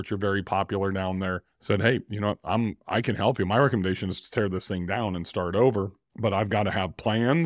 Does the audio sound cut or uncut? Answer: cut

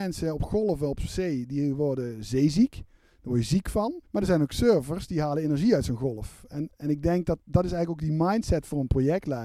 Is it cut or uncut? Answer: cut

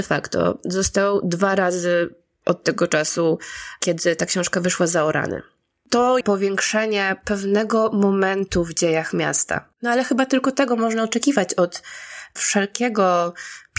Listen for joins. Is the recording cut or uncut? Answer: cut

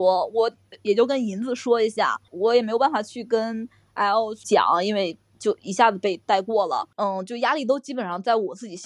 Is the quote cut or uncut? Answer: uncut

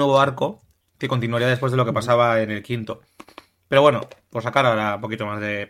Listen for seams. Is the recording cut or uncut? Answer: uncut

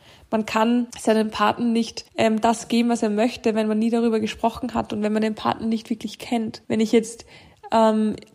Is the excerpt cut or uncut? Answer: cut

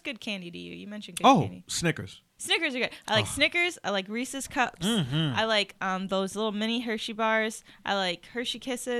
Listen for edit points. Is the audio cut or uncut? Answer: cut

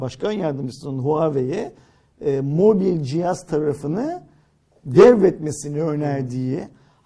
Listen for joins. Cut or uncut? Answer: uncut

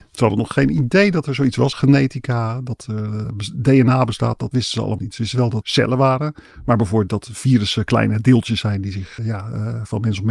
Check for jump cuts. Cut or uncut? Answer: cut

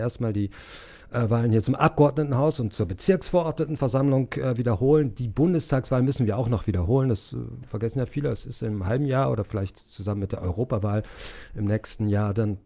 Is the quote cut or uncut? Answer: uncut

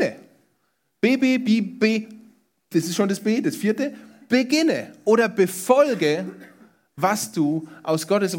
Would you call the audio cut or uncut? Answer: uncut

